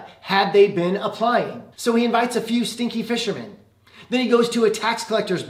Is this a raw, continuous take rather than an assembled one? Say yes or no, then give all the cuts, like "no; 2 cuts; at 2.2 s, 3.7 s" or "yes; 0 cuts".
no; 1 cut; at 1.7 s